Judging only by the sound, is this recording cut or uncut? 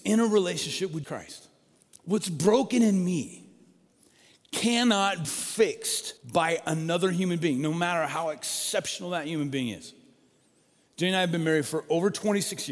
cut